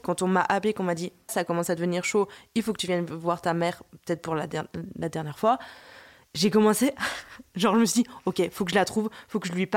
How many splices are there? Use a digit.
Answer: 1